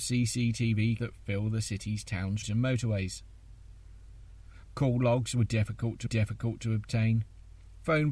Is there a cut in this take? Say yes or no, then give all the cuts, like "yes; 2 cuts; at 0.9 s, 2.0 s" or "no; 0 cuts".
yes; 3 cuts; at 1.0 s, 2.4 s, 6.1 s